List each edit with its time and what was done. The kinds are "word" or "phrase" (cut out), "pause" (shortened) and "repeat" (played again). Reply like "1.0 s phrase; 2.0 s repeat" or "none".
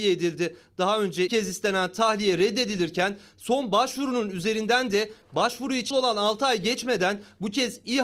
1.3 s word; 5.9 s word